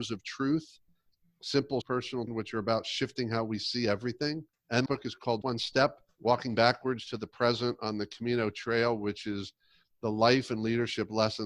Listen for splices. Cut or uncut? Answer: cut